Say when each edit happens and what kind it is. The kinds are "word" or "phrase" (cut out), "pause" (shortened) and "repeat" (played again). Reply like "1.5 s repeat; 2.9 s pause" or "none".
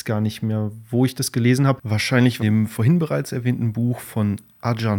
2.4 s phrase